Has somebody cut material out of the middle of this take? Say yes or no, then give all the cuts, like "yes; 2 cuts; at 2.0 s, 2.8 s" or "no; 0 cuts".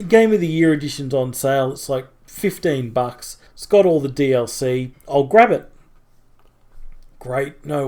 yes; 2 cuts; at 3.5 s, 4.9 s